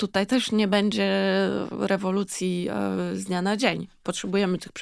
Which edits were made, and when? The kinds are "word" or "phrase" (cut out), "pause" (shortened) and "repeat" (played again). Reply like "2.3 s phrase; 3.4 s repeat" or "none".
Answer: none